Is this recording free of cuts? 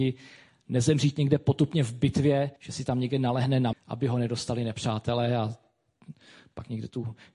no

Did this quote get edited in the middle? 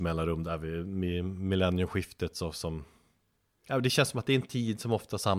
no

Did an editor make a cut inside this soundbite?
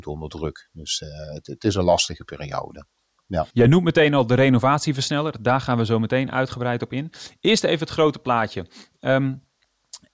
yes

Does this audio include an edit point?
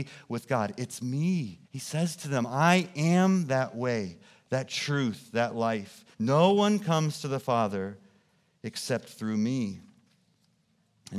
yes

